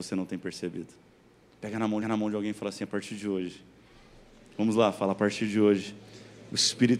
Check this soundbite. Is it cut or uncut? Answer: cut